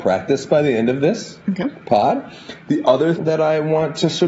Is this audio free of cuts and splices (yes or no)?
no